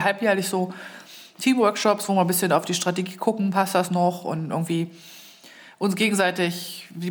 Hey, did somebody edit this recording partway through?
no; 0 cuts

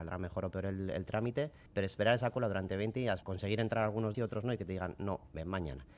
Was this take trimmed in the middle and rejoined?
yes; 3 cuts; at 1.7 s, 3.2 s, 4.1 s

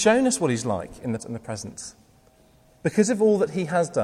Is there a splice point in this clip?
yes; 1 cut; at 1.2 s

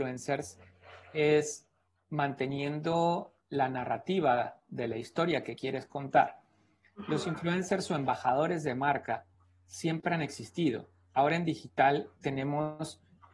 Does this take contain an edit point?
no; 0 cuts

